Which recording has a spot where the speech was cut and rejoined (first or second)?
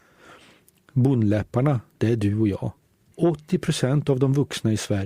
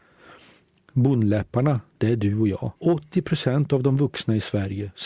second